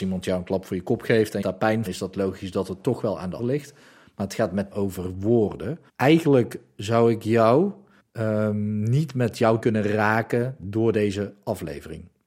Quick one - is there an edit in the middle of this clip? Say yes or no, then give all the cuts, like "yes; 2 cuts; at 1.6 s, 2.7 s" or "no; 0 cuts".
yes; 7 cuts; at 1.4 s, 1.9 s, 3.4 s, 4.7 s, 5.9 s, 8.0 s, 9.6 s